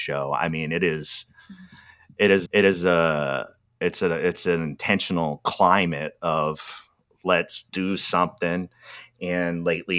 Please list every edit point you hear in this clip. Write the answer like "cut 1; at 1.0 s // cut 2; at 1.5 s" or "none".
cut 1; at 2.5 s // cut 2; at 7.7 s